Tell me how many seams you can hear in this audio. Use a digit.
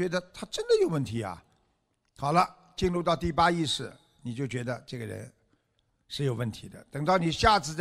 0